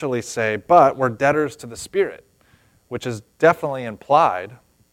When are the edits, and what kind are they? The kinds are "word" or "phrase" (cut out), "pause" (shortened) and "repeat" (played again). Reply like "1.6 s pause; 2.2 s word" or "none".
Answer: none